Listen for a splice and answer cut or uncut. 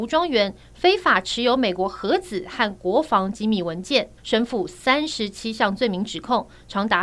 cut